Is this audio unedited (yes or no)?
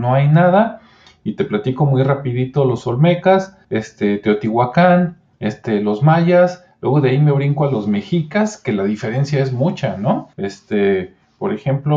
no